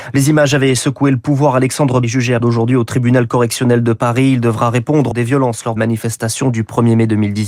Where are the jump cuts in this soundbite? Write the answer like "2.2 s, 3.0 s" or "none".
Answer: 2.0 s, 2.4 s, 5.1 s, 5.8 s